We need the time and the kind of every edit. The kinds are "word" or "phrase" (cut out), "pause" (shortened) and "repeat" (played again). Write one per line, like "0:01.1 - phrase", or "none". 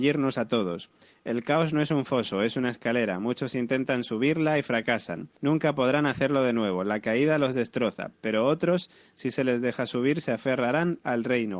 0:05.4 - pause